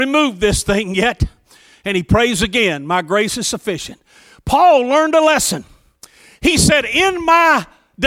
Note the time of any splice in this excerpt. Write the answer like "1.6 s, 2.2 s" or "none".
none